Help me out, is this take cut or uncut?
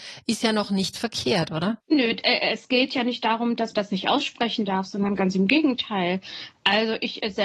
cut